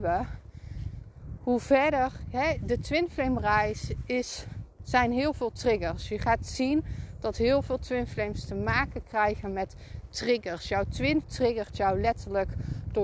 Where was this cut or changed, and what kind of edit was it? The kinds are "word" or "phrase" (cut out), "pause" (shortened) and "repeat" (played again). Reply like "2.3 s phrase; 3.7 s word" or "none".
11.2 s word